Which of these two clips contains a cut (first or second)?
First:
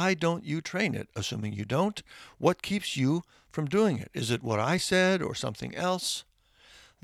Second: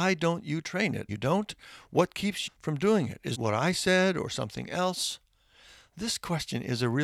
second